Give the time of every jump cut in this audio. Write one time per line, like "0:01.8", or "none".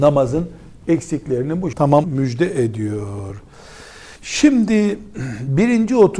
0:01.7
0:02.0
0:04.2